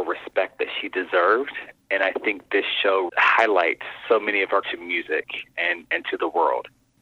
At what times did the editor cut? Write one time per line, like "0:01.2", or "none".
0:03.1
0:04.6